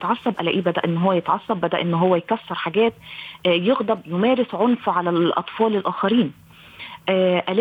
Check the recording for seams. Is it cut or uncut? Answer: uncut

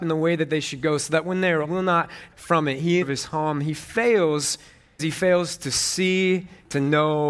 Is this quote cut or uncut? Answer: cut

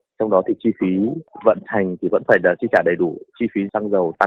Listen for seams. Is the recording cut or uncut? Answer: uncut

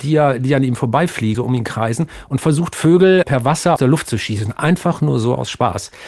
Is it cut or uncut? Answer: cut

